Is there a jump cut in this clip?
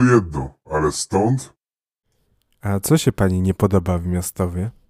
no; 0 cuts

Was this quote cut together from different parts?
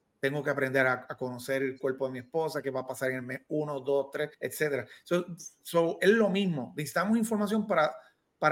yes; 1 cut; at 4.3 s

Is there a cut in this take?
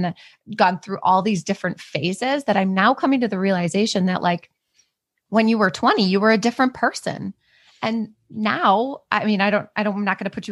no; 0 cuts

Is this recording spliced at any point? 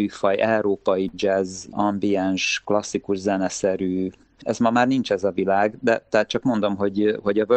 no; 0 cuts

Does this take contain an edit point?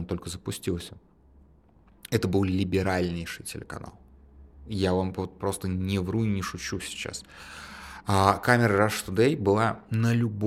no; 0 cuts

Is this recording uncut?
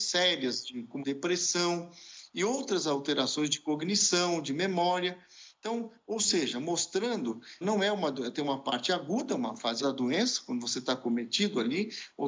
no; 3 cuts; at 1.0 s, 7.6 s, 9.8 s

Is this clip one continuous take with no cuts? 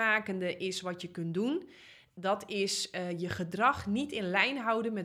yes; 0 cuts

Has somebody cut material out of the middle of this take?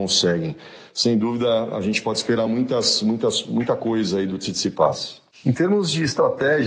no; 0 cuts

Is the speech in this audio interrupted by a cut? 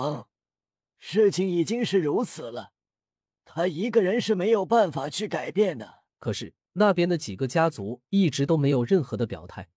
yes; 2 cuts; at 6.1 s, 6.6 s

